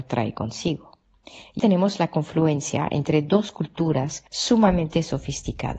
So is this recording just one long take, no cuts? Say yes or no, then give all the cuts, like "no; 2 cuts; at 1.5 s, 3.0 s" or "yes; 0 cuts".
no; 2 cuts; at 1.6 s, 4.3 s